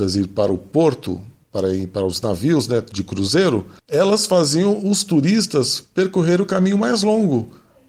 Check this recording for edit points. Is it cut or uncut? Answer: cut